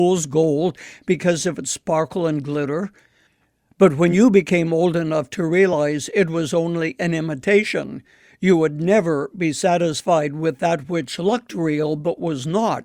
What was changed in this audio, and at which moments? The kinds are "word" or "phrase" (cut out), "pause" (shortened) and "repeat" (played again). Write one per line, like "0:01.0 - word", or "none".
none